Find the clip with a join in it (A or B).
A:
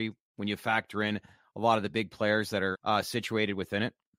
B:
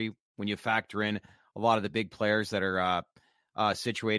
A